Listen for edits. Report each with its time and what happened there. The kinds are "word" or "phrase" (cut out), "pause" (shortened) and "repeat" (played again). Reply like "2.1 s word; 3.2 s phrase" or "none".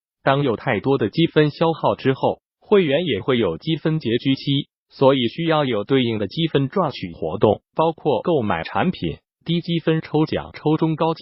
7.7 s pause; 9.4 s phrase